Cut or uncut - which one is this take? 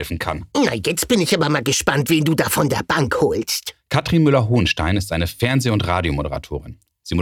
uncut